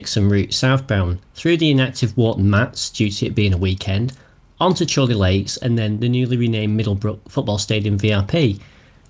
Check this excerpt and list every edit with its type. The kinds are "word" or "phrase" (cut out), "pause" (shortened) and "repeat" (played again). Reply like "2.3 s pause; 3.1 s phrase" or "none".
none